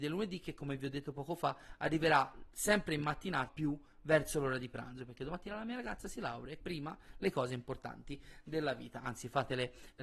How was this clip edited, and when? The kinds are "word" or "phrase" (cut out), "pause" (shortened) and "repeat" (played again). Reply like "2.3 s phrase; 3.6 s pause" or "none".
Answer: 3.5 s word; 6.6 s word